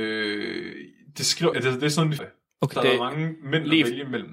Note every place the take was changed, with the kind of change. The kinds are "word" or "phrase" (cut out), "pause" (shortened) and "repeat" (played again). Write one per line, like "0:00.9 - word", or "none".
0:01.5 - word
0:02.2 - word
0:02.7 - phrase